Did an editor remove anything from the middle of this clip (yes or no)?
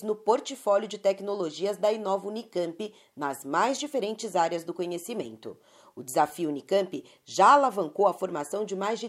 no